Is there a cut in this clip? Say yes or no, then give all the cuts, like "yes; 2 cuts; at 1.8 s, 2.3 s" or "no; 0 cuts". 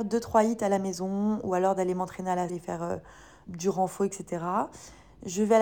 yes; 2 cuts; at 2.5 s, 3.5 s